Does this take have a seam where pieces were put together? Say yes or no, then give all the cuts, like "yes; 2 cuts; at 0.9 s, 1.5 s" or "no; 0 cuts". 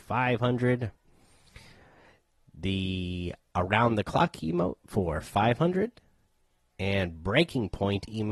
no; 0 cuts